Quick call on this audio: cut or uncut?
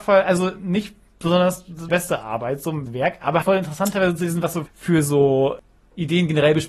cut